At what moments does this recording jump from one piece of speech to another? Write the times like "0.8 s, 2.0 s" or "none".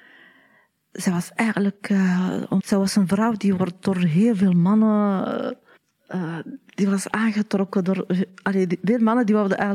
2.6 s, 5.8 s